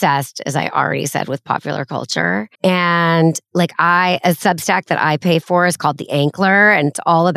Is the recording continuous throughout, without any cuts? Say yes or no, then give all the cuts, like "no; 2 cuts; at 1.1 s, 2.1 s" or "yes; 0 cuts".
no; 1 cut; at 2.5 s